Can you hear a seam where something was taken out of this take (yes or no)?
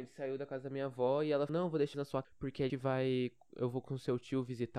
yes